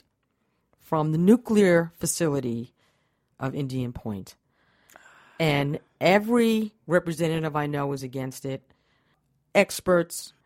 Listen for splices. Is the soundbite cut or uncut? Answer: uncut